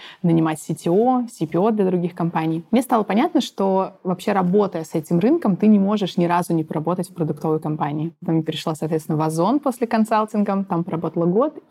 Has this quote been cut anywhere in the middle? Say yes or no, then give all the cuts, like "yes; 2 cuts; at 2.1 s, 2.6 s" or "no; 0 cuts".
no; 0 cuts